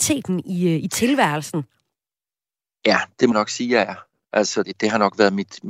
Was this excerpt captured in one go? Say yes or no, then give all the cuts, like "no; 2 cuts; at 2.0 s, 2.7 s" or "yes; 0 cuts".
no; 2 cuts; at 3.3 s, 4.6 s